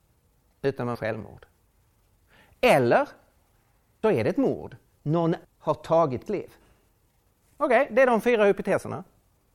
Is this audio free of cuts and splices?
no; 4 cuts; at 1.0 s, 4.0 s, 5.4 s, 6.3 s

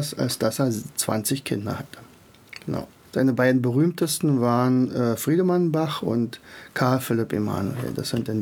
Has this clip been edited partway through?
no; 0 cuts

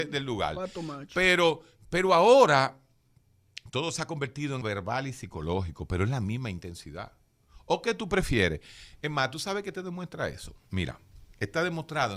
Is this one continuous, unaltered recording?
no; 1 cut; at 4.6 s

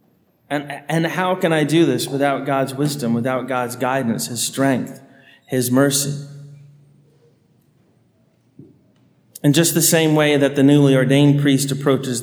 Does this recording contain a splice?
no; 0 cuts

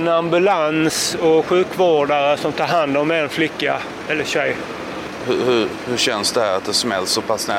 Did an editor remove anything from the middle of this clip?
yes; 1 cut; at 2.4 s

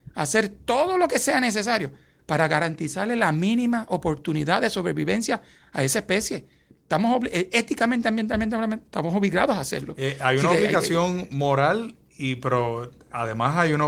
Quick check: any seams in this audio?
no; 0 cuts

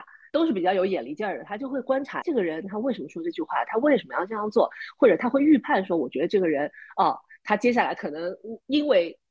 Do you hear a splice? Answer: yes; 1 cut; at 2.2 s

